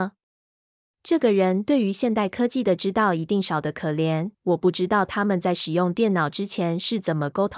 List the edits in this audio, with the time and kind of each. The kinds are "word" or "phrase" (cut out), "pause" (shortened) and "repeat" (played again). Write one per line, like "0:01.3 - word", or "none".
0:04.3 - pause